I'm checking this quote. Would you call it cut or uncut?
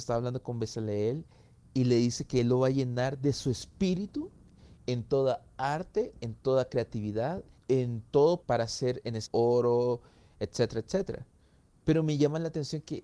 cut